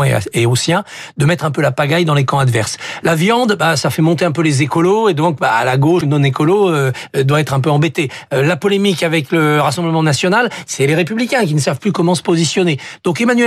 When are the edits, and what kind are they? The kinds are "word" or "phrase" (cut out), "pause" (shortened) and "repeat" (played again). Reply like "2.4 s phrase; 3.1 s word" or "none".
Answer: none

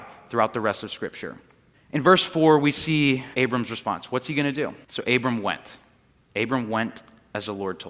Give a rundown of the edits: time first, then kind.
1.7 s pause; 3.3 s pause; 4.8 s pause

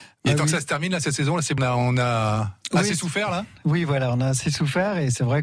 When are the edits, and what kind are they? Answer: 1.6 s word

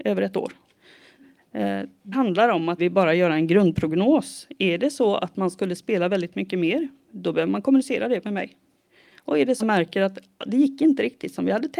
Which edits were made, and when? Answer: 2.1 s word; 2.8 s word; 9.6 s phrase

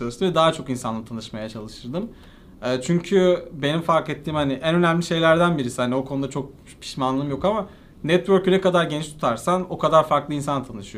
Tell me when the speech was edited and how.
none

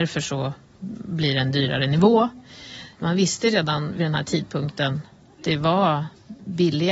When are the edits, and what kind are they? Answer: 5.4 s word

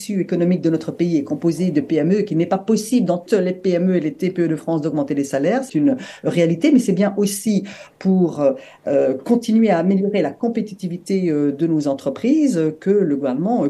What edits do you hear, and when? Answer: 3.3 s word; 5.7 s word

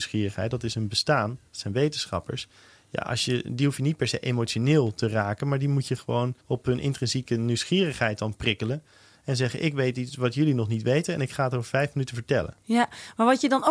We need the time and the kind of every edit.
1.5 s pause; 6.4 s pause

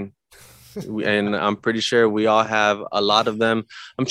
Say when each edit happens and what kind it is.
none

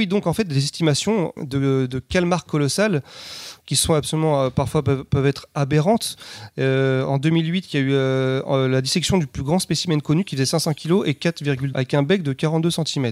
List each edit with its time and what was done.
1.4 s word; 11.7 s phrase

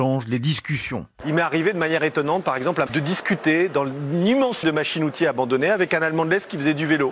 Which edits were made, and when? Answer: 2.9 s word; 4.6 s word

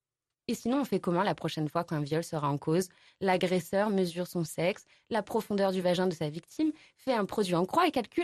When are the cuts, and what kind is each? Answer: none

